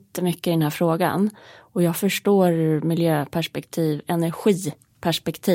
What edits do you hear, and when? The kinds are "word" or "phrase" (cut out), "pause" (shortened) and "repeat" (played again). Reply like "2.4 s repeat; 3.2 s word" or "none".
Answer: none